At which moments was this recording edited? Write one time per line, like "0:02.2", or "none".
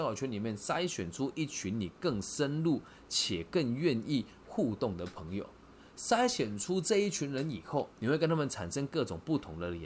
none